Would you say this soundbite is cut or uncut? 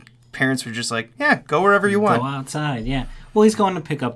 uncut